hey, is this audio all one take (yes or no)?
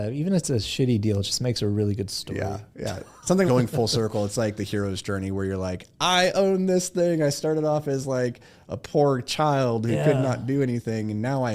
no